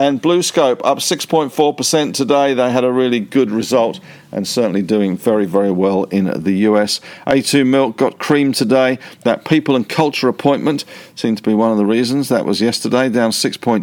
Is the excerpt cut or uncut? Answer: uncut